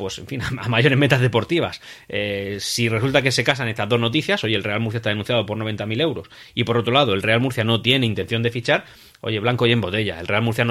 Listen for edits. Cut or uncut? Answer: uncut